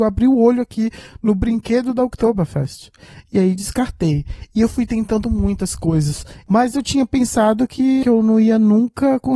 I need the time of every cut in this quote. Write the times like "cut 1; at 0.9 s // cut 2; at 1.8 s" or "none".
none